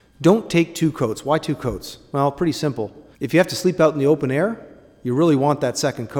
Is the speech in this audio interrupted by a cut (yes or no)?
yes